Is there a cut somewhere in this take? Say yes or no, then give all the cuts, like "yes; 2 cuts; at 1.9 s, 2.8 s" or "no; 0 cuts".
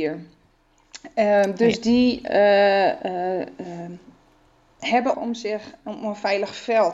yes; 1 cut; at 5.1 s